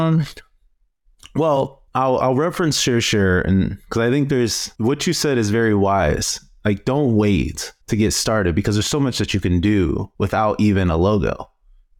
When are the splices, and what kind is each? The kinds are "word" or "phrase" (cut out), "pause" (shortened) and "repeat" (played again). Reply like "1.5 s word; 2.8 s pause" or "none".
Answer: 1.9 s pause; 4.8 s pause; 7.8 s pause; 10.2 s pause